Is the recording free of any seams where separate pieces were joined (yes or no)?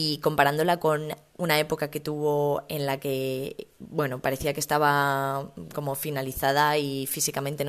yes